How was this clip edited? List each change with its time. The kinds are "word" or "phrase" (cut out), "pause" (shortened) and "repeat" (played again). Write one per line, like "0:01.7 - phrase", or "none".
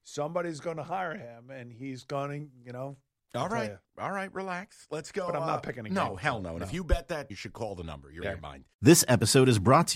0:03.2 - word
0:07.3 - word
0:08.2 - word